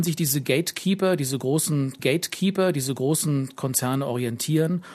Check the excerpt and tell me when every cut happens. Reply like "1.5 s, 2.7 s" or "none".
2.0 s